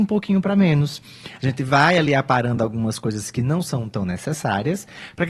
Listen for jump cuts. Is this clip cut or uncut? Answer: uncut